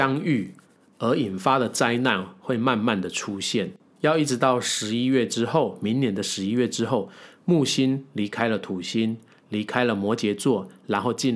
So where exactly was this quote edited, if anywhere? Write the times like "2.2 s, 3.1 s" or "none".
none